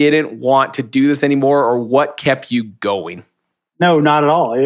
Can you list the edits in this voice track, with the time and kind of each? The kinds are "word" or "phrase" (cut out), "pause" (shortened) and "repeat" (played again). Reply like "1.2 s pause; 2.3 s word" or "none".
none

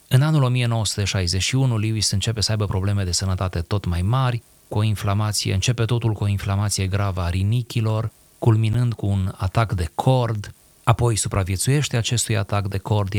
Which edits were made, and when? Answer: none

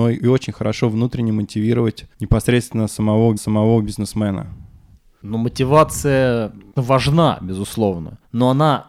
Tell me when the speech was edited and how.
2.1 s pause; 3.4 s repeat; 6.8 s word

